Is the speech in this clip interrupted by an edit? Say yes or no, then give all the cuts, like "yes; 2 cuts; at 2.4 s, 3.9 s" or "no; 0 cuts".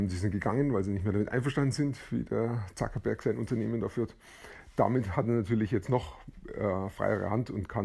no; 0 cuts